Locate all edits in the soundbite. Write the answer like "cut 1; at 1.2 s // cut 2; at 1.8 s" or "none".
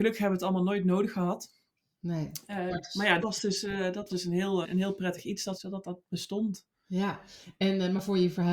cut 1; at 2.7 s // cut 2; at 3.2 s // cut 3; at 4.1 s // cut 4; at 4.6 s // cut 5; at 5.6 s